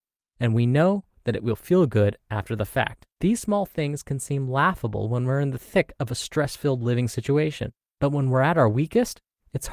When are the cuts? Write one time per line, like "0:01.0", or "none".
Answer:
0:03.1
0:07.9